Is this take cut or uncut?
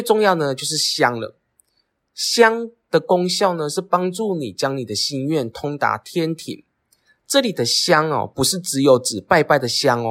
uncut